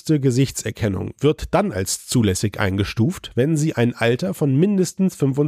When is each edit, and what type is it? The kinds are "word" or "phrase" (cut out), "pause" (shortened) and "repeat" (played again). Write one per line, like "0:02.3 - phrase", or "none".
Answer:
none